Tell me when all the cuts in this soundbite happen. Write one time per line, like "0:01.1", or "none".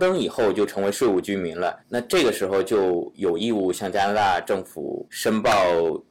0:01.8
0:05.1